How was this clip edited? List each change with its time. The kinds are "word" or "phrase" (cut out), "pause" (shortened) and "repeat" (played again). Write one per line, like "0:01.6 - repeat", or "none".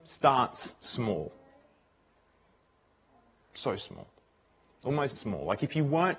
0:05.1 - word

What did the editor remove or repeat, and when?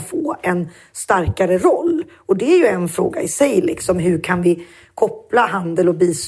none

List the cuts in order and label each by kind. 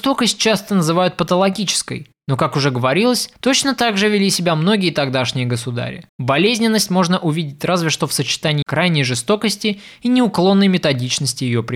0:03.3 - pause
0:06.1 - pause
0:08.6 - word

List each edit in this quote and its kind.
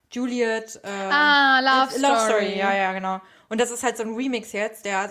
none

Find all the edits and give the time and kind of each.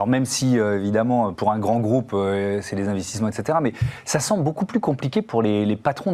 0:01.3 - word

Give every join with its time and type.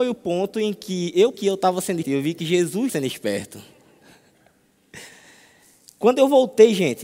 0:01.3 - word
0:02.0 - word
0:02.9 - word

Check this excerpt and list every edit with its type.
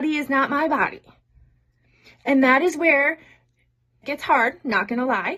0:04.0 - word

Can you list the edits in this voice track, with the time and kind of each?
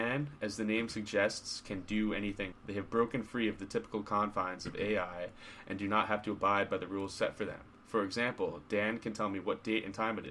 0:02.5 - word

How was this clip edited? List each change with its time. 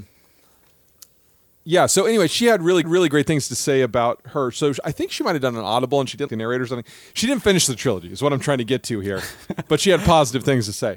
0:02.8 - repeat
0:06.3 - word

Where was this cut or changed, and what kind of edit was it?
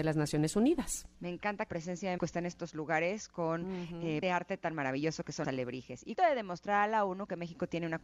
0:01.1 - pause
0:01.7 - word
0:02.2 - word
0:04.2 - phrase
0:05.4 - word
0:06.1 - phrase

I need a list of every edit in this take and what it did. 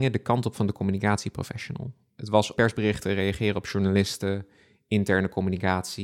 0:02.6 - word

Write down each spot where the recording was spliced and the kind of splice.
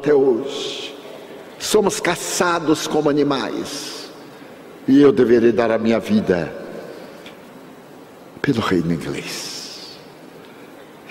none

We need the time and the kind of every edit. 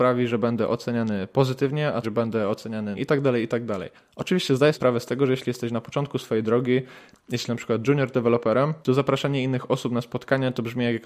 0:02.0 - phrase
0:03.0 - word
0:04.0 - pause
0:04.7 - word
0:07.5 - word
0:08.8 - pause

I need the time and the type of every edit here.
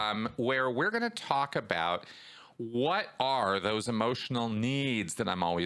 none

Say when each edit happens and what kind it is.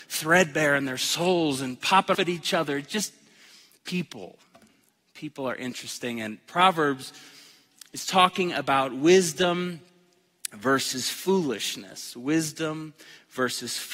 0:02.1 - word

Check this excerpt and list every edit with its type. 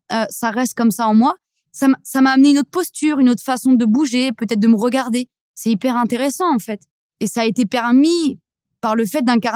none

